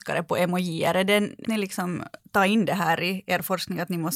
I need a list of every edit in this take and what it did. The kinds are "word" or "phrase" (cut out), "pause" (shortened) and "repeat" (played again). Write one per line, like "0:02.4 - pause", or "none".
0:01.4 - word